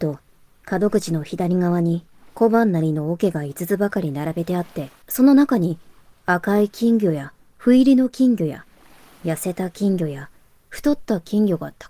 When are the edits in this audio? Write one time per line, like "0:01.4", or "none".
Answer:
0:05.0